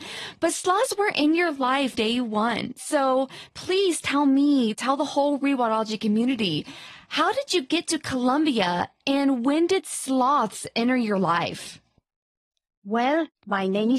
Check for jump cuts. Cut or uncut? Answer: cut